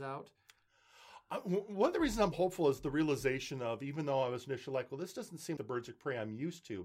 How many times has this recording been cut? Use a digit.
1